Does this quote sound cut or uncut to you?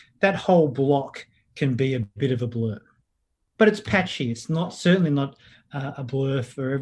uncut